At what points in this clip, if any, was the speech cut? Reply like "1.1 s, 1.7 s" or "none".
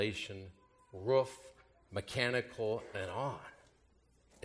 2.9 s

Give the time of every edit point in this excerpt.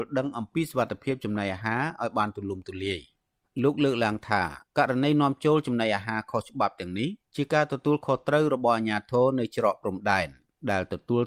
4.7 s

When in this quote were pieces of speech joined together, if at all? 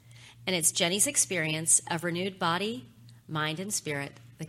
none

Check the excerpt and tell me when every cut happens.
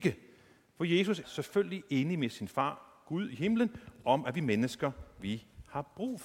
1.2 s

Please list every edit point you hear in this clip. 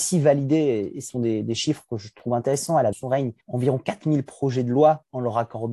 1.1 s, 2.9 s, 3.4 s

